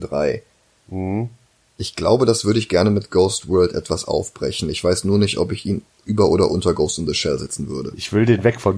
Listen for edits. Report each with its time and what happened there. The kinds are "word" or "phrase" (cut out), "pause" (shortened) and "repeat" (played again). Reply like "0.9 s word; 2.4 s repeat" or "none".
none

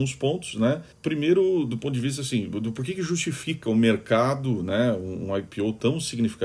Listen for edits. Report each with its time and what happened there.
0.9 s pause

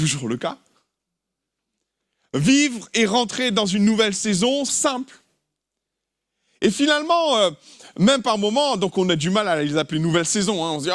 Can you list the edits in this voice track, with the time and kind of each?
4.7 s phrase

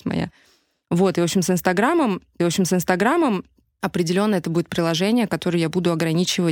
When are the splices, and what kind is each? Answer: 2.4 s repeat

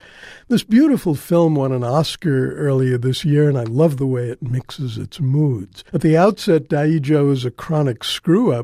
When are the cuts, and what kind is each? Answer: 5.9 s pause

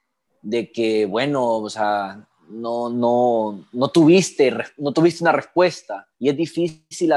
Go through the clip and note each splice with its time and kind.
6.1 s pause

